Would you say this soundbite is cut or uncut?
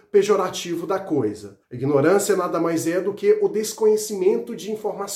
cut